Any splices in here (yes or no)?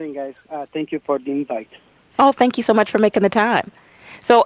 no